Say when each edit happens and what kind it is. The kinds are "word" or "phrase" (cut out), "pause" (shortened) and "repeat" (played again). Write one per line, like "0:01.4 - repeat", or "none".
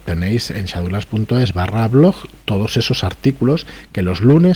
none